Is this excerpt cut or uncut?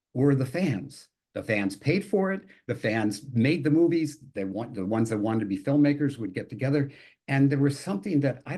uncut